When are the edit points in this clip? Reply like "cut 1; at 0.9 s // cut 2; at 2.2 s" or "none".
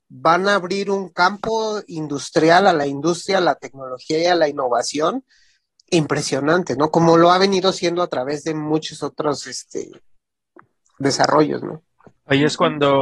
none